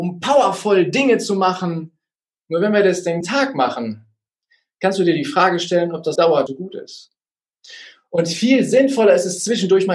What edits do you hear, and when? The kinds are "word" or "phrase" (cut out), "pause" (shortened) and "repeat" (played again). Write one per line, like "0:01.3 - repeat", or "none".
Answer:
0:03.2 - word
0:06.2 - word
0:06.5 - word